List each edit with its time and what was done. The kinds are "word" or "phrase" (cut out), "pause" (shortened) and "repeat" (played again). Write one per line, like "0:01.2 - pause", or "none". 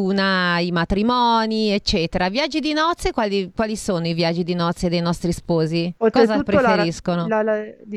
0:06.0 - pause